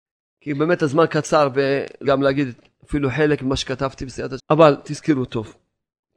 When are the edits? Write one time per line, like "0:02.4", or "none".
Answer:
0:02.0
0:04.4